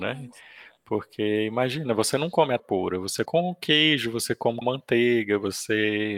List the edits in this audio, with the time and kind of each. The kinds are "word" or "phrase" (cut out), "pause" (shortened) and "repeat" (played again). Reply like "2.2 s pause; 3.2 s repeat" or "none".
2.6 s word; 3.2 s word; 4.6 s word